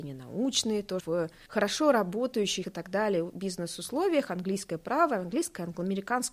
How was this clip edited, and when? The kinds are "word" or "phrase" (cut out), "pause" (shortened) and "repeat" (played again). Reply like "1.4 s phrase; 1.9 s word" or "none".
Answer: 1.0 s word; 2.6 s word